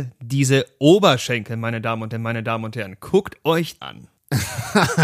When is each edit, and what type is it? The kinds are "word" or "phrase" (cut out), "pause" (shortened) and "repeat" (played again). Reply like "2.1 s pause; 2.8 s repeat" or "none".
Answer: 2.1 s repeat; 3.8 s word